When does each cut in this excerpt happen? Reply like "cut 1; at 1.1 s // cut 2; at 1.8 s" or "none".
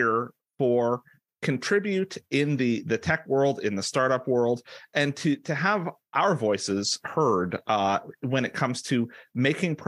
cut 1; at 1.3 s